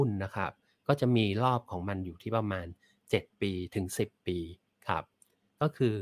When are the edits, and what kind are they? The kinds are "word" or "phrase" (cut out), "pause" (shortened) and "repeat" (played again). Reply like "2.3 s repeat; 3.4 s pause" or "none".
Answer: none